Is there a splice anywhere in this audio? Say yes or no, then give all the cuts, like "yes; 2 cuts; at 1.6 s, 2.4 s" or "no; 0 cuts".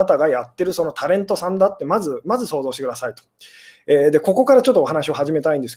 no; 0 cuts